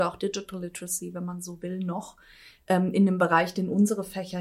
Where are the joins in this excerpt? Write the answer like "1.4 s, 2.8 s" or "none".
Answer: none